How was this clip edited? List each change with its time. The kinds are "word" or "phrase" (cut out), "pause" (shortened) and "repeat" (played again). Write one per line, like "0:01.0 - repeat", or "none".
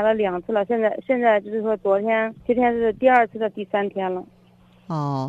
0:02.4 - pause